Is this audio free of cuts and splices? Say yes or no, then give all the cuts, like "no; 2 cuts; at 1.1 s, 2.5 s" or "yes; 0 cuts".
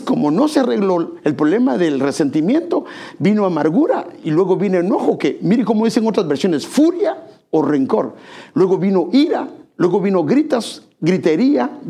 yes; 0 cuts